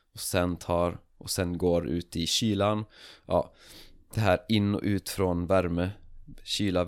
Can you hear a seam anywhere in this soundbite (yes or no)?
no